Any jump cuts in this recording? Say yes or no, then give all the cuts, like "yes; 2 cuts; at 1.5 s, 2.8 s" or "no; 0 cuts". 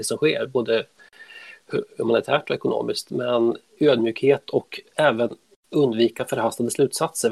no; 0 cuts